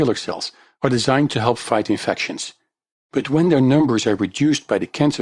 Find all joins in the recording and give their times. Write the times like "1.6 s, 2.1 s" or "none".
none